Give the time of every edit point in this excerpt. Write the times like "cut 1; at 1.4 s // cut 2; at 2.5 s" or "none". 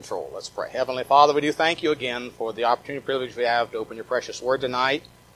none